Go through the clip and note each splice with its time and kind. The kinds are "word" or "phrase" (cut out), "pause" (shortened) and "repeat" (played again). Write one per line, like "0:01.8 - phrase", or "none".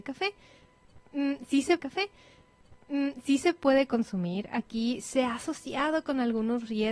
0:01.8 - repeat

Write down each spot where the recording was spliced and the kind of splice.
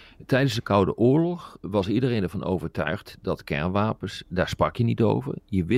0:01.6 - word

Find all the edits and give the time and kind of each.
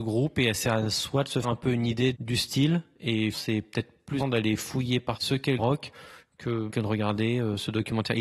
0:01.4 - word
0:02.1 - word
0:03.3 - word
0:04.2 - word
0:05.2 - word
0:05.6 - word
0:06.7 - word

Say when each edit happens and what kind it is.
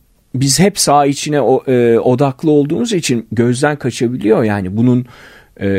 none

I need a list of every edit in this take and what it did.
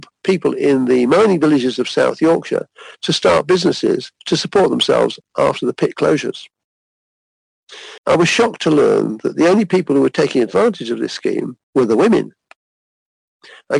0:04.1 - pause
0:08.0 - pause
0:11.6 - pause

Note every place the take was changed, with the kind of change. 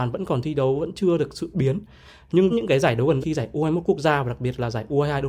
0:01.5 - word
0:02.5 - word
0:03.2 - word

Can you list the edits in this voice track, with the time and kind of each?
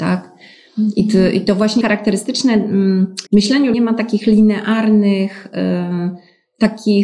0:01.8 - word
0:03.3 - pause
0:03.7 - word

